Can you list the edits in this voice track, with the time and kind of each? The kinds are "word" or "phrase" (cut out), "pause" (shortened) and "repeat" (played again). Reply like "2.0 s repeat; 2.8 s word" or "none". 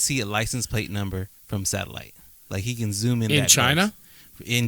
1.4 s pause